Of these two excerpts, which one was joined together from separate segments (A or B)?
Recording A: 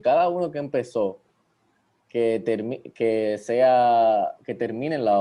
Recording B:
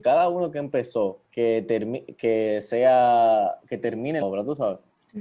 B